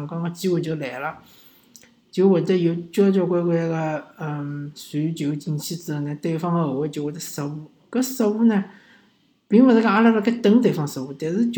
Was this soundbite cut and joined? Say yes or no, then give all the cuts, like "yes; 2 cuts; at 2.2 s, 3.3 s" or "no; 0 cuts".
no; 0 cuts